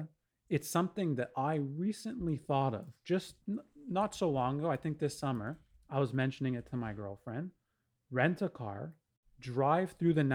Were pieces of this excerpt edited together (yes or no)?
yes